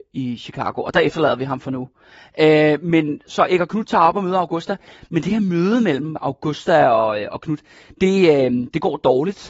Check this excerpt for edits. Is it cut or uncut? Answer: uncut